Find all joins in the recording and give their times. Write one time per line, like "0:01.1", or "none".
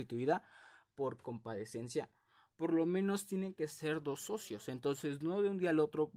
none